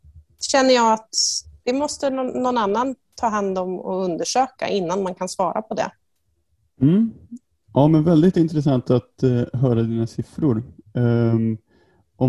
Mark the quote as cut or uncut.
uncut